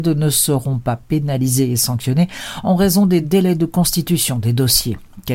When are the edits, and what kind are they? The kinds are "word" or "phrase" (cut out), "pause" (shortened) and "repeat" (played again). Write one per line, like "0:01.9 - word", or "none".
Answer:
none